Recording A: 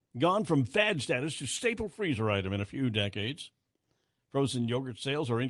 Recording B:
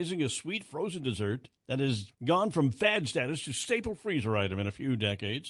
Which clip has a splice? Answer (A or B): B